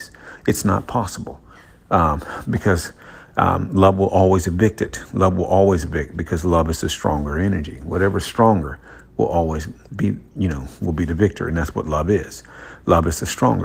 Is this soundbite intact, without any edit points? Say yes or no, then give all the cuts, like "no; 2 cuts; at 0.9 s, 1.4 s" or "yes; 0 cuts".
yes; 0 cuts